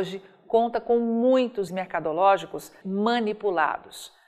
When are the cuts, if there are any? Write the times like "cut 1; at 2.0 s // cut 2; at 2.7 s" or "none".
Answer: cut 1; at 1.7 s // cut 2; at 2.8 s